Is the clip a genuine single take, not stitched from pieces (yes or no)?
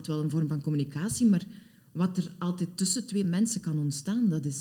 yes